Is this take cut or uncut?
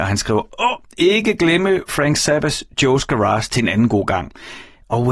uncut